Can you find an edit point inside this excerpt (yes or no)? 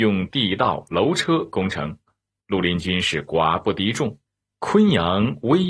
no